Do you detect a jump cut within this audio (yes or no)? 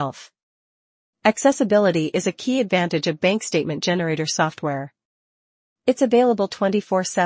no